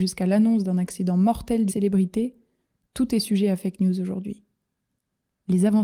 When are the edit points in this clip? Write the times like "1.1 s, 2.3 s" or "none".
1.7 s